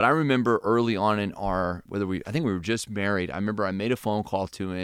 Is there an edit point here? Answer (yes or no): yes